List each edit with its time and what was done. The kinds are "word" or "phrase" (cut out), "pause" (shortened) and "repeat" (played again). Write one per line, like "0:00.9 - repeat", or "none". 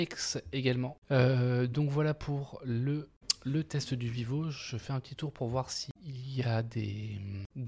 none